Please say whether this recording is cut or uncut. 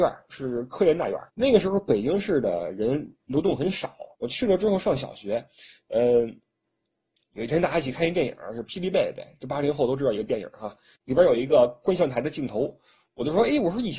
cut